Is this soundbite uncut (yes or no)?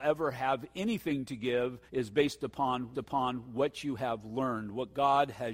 no